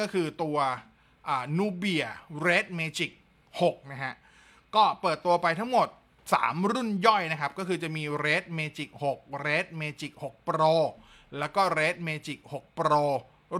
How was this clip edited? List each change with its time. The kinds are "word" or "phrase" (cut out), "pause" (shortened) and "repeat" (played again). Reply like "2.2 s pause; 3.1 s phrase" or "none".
none